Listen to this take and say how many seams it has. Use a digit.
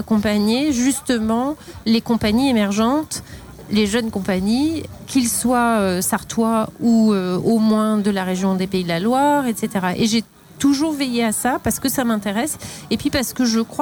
0